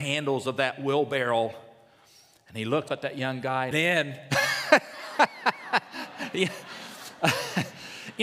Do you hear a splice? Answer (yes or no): yes